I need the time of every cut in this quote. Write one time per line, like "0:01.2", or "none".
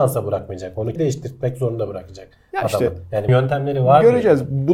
0:01.0
0:03.3